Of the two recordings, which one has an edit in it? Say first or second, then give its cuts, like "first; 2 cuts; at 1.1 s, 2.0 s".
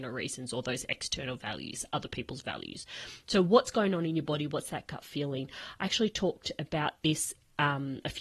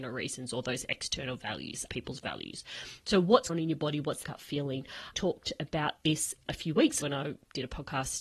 second; 6 cuts; at 1.9 s, 3.5 s, 4.2 s, 5.1 s, 6.5 s, 7.0 s